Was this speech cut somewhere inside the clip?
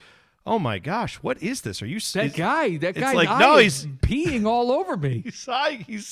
no; 0 cuts

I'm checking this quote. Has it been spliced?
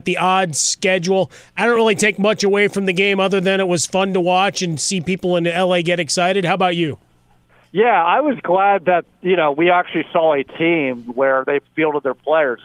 no; 0 cuts

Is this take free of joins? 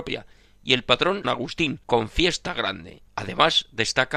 no; 3 cuts; at 1.2 s, 1.8 s, 3.1 s

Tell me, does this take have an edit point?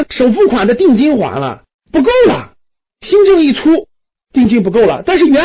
yes; 1 cut; at 1.7 s

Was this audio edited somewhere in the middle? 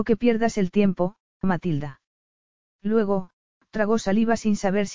yes; 1 cut; at 1.4 s

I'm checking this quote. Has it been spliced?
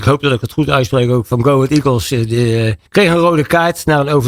yes; 1 cut; at 2.9 s

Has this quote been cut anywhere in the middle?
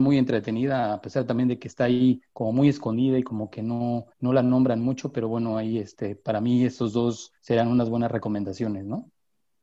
yes; 3 cuts; at 2.3 s, 4.1 s, 7.4 s

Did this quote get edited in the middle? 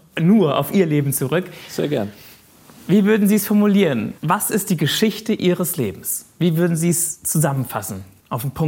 yes; 1 cut; at 4.2 s

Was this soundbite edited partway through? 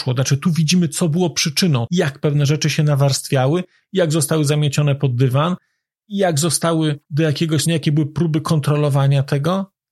yes; 1 cut; at 7.7 s

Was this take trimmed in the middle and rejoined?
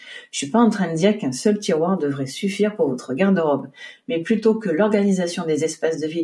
no; 0 cuts

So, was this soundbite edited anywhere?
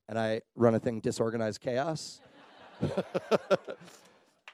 yes; 1 cut; at 1.0 s

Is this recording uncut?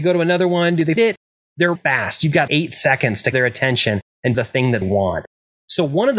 no; 6 cuts; at 1.0 s, 1.7 s, 2.5 s, 3.3 s, 4.3 s, 4.8 s

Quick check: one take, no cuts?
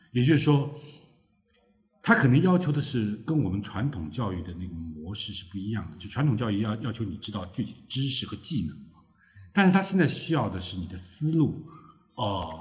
yes; 0 cuts

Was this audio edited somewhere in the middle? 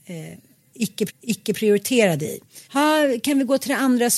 yes; 2 cuts; at 1.1 s, 2.6 s

